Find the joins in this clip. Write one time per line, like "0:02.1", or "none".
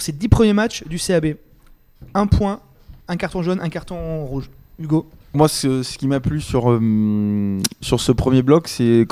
0:03.0
0:05.3